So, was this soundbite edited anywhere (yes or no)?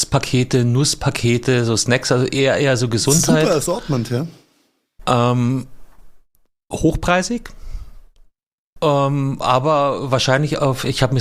no